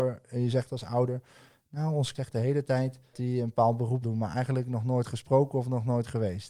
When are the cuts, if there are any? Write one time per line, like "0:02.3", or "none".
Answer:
0:02.1
0:03.1
0:04.0